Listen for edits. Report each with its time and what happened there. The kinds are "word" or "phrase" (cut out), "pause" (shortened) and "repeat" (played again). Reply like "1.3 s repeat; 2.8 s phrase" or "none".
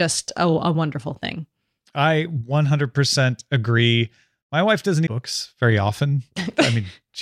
5.1 s phrase

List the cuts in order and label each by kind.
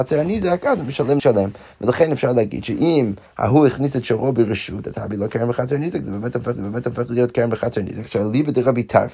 1.2 s word; 6.6 s repeat

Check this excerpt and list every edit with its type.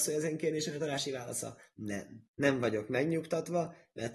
2.3 s pause

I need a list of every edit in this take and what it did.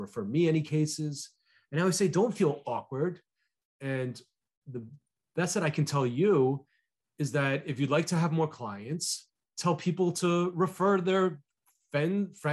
none

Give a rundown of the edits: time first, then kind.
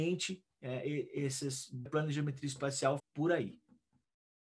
1.9 s word; 3.0 s word

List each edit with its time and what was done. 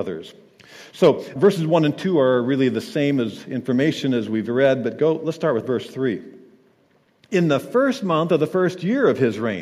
1.4 s word

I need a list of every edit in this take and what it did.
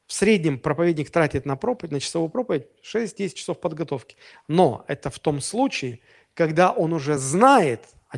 none

